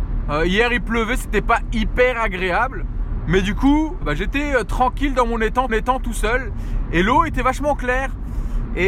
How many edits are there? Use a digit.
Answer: 2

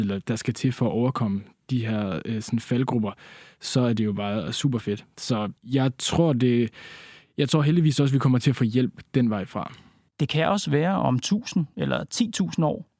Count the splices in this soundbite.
1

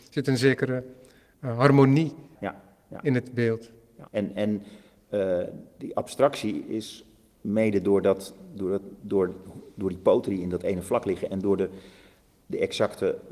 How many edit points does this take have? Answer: 2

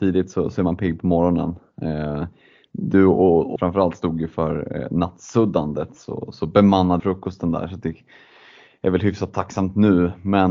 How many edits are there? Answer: 2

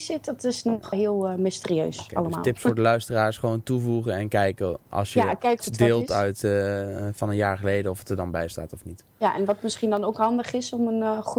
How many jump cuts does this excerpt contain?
2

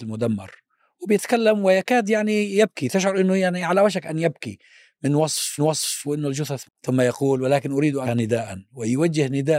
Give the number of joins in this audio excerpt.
3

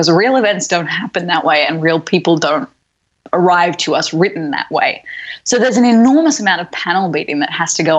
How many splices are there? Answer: 0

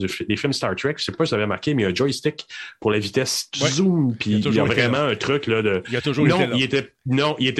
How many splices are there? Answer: 0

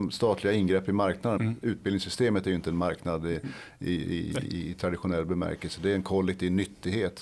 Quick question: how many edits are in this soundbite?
1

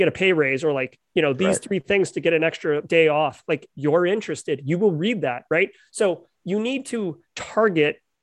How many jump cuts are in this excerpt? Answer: 0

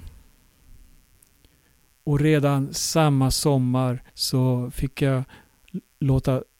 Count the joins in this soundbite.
1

